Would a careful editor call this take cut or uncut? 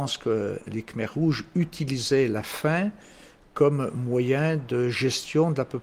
uncut